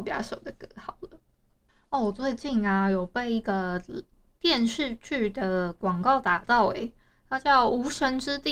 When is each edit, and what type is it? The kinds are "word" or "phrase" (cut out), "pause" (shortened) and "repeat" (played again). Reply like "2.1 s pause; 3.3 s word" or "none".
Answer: none